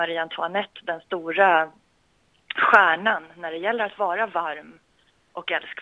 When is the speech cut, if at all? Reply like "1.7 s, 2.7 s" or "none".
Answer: none